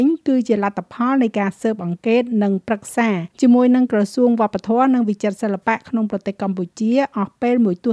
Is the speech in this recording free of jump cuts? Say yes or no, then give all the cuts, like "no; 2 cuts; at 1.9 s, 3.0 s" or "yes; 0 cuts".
no; 1 cut; at 3.3 s